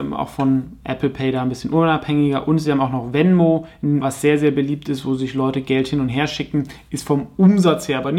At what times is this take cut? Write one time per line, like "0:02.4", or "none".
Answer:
0:04.0